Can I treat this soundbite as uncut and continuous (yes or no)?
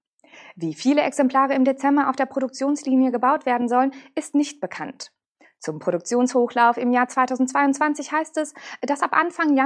yes